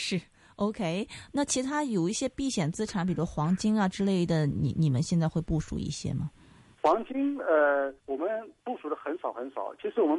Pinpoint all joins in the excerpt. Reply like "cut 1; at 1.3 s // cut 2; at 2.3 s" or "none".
cut 1; at 8.0 s // cut 2; at 8.6 s